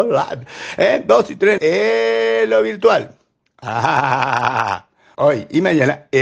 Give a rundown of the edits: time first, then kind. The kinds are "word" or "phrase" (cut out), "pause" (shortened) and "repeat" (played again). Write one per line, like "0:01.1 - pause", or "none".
0:01.6 - word
0:05.1 - phrase